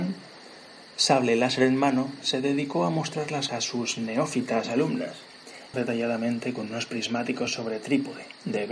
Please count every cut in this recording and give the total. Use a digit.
3